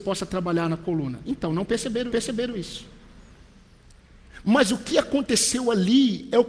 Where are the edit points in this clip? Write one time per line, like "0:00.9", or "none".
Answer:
0:02.1